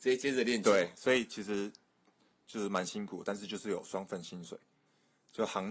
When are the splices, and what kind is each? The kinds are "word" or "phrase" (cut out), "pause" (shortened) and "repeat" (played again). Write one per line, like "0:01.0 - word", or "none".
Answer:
none